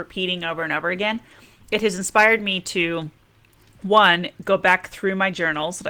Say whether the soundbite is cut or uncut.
uncut